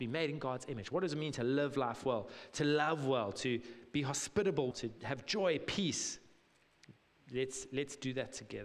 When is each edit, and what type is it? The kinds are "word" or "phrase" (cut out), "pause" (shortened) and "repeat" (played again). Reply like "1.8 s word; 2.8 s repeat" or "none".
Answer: 4.7 s word